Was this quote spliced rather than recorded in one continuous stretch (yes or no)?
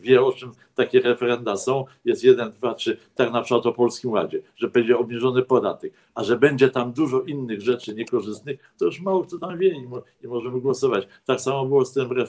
no